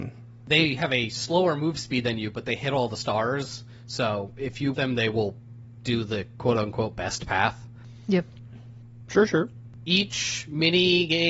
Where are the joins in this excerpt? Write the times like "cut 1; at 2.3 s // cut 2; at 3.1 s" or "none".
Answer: cut 1; at 4.7 s